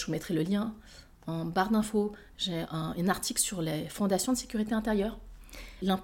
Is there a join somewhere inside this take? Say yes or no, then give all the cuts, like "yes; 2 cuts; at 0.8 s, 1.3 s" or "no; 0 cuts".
no; 0 cuts